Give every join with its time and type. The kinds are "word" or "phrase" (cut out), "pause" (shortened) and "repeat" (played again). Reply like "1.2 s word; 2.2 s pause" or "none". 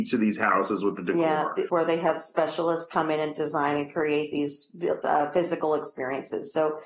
1.7 s phrase; 5.0 s word

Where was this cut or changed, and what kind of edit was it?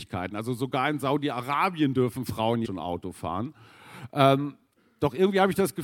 2.6 s word; 4.7 s pause

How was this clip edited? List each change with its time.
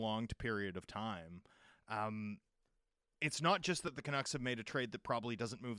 none

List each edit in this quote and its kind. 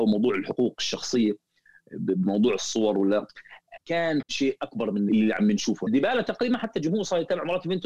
3.8 s word; 4.2 s word; 5.1 s word; 5.9 s word

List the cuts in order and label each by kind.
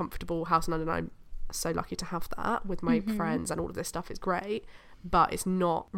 none

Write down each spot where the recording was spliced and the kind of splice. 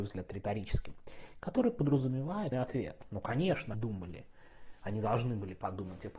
2.5 s phrase; 3.7 s word

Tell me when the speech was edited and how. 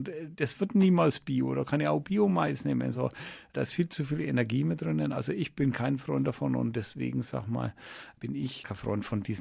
none

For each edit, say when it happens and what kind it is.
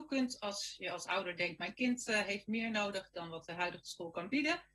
none

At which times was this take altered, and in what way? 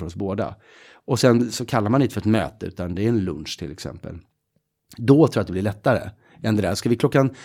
none

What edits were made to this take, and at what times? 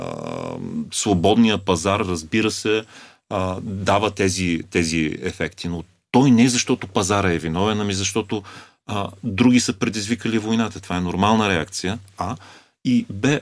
none

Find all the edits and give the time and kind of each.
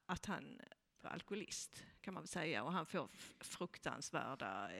1.0 s word

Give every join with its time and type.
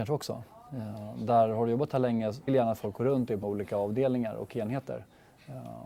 2.5 s phrase; 3.4 s word

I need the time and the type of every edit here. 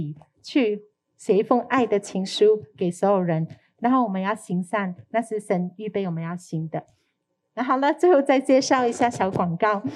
none

